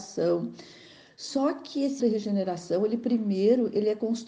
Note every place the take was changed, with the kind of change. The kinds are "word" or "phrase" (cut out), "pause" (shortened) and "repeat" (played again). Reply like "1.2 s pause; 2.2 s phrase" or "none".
2.0 s word